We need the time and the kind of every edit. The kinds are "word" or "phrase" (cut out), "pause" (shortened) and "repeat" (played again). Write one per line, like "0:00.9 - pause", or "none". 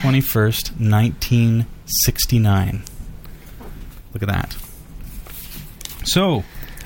none